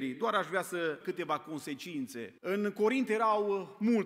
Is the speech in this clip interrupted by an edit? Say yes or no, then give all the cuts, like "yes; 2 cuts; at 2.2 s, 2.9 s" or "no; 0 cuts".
yes; 2 cuts; at 1.0 s, 2.4 s